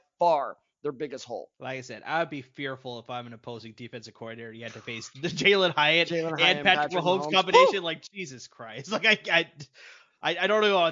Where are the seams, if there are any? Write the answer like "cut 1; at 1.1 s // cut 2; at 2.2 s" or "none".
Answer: cut 1; at 1.5 s